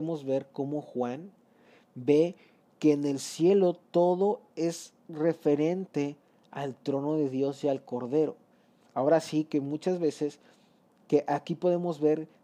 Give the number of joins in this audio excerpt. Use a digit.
1